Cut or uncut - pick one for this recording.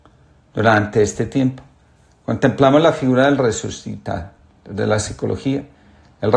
uncut